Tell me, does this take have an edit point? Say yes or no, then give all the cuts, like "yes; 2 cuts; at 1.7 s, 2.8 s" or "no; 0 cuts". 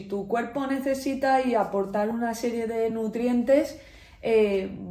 no; 0 cuts